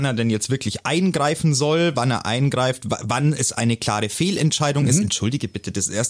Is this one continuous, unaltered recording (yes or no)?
yes